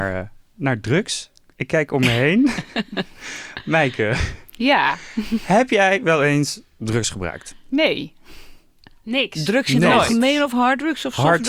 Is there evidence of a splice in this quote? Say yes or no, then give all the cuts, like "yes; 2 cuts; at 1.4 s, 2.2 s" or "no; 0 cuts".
no; 0 cuts